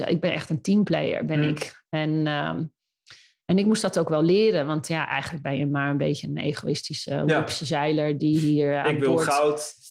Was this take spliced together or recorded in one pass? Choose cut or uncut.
uncut